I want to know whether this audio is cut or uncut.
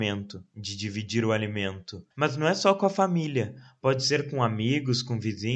cut